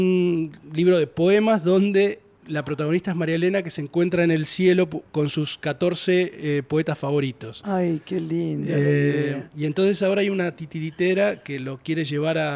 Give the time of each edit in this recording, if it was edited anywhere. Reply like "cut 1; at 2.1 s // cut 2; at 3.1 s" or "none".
none